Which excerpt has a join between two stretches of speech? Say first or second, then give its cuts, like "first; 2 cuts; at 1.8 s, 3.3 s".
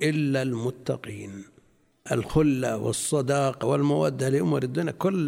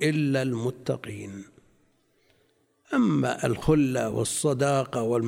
first; 2 cuts; at 2.1 s, 3.6 s